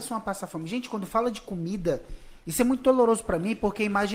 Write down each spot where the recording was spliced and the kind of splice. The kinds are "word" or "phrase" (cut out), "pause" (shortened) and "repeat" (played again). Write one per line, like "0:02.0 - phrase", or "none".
none

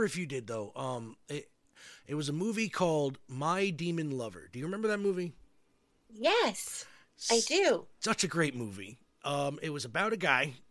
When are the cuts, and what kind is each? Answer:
none

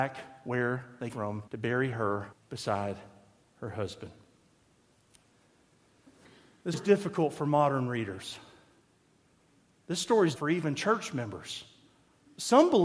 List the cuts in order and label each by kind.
0:01.1 - word
0:01.5 - pause
0:02.3 - pause
0:06.7 - word
0:10.4 - word

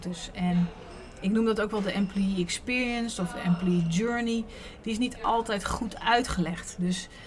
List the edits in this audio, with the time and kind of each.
none

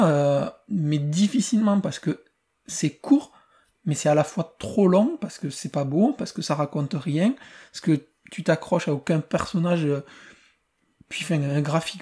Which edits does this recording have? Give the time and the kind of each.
none

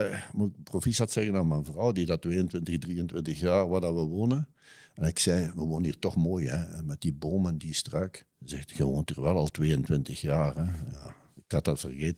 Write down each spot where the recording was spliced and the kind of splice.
0:08.3 - pause

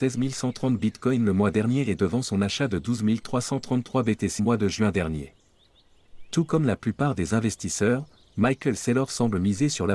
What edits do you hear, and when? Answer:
0:04.4 - word

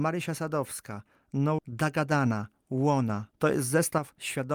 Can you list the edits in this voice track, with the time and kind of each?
0:01.6 - word

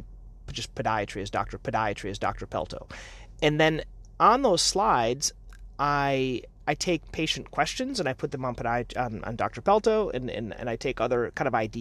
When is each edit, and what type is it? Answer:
0:01.6 - repeat

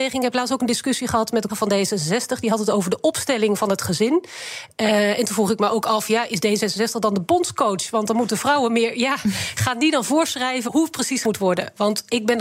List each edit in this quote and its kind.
0:01.5 - word
0:10.7 - word
0:11.2 - word

